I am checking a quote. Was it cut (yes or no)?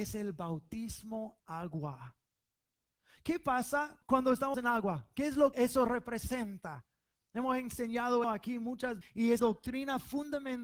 yes